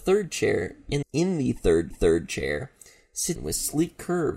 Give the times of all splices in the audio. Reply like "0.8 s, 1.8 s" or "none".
1.0 s, 1.9 s, 3.4 s